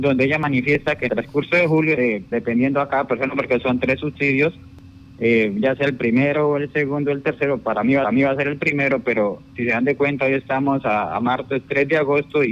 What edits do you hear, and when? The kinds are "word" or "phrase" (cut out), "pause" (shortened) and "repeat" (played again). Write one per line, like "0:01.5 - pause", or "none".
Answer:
0:01.1 - word
0:02.0 - phrase
0:02.3 - word
0:08.0 - repeat